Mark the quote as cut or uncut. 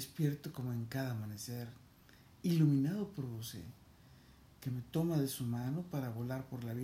uncut